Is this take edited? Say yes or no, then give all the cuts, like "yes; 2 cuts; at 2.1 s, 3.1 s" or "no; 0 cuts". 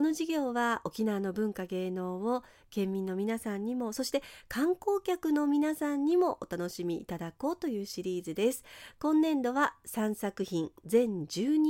no; 0 cuts